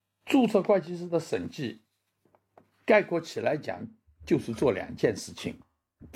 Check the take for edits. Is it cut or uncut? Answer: uncut